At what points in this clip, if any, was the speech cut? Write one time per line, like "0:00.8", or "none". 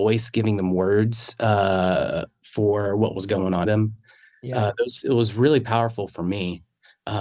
0:03.6